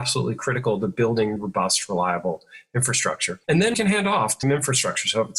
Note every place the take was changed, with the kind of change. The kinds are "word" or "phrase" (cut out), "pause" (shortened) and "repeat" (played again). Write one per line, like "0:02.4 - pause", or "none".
0:01.4 - word
0:03.4 - pause
0:03.7 - word
0:04.4 - word